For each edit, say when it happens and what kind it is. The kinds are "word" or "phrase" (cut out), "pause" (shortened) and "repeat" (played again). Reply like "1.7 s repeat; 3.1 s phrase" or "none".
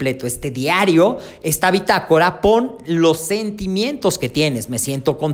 none